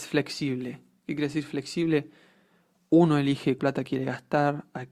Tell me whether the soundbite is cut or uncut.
cut